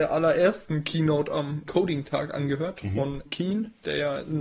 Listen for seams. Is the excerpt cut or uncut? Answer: cut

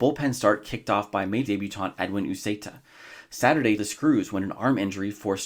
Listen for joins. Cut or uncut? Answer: cut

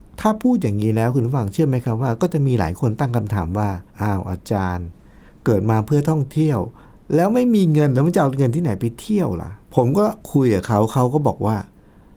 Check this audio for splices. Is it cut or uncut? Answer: cut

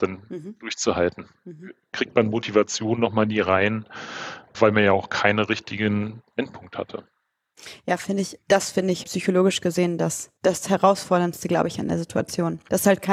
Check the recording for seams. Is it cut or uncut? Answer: cut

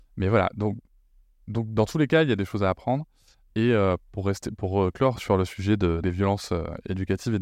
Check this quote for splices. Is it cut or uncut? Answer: cut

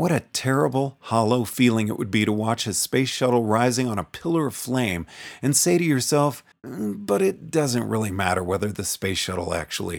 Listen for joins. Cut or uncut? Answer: cut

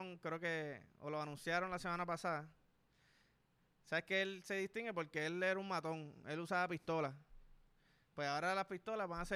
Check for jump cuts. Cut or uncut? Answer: uncut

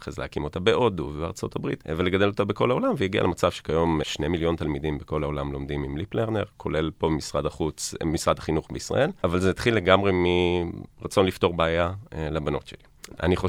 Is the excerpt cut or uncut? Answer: cut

